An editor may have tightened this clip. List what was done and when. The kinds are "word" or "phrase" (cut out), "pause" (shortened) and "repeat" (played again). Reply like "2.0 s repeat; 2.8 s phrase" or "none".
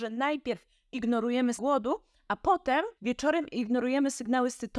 1.6 s word; 3.0 s pause